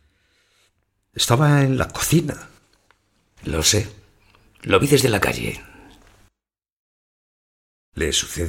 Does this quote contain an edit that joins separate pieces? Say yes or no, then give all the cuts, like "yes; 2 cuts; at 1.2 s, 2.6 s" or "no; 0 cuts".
no; 0 cuts